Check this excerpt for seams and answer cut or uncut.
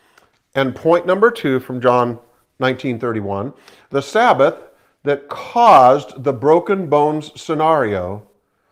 uncut